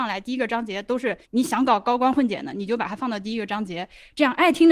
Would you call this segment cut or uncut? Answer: cut